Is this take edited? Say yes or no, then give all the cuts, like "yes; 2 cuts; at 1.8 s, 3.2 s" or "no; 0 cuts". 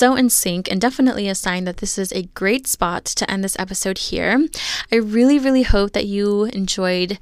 no; 0 cuts